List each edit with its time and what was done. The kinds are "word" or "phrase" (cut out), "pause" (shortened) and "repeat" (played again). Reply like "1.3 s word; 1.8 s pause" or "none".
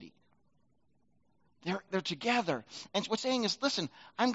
1.9 s word; 3.2 s word